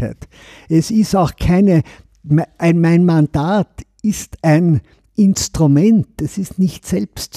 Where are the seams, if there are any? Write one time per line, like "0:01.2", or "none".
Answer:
none